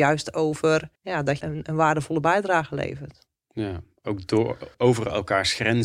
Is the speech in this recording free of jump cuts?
no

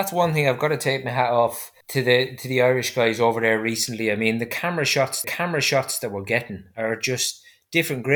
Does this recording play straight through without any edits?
no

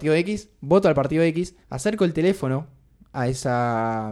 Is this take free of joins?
no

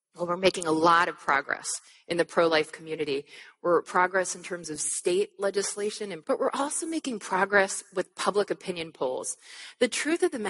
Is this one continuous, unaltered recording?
no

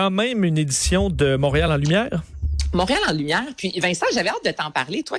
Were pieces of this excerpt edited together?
no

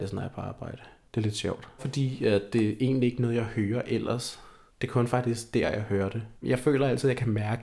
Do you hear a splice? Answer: yes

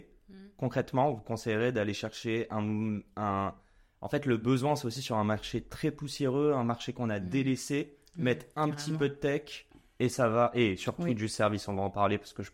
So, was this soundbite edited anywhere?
no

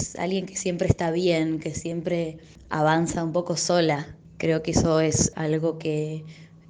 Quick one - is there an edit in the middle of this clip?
no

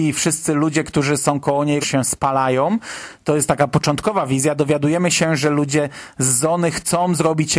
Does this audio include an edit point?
yes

